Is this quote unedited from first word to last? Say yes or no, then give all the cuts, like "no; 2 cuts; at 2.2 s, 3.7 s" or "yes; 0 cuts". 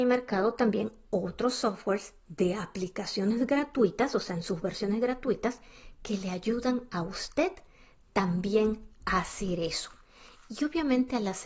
yes; 0 cuts